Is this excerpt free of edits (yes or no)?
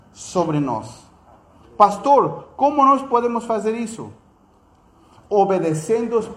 yes